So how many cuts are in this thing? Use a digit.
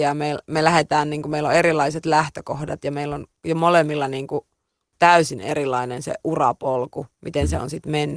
0